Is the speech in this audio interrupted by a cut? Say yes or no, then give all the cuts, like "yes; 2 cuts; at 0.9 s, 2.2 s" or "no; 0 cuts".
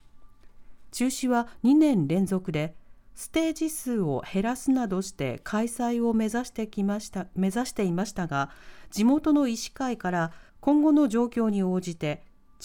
yes; 1 cut; at 10.5 s